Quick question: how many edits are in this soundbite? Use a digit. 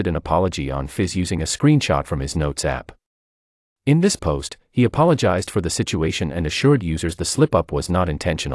0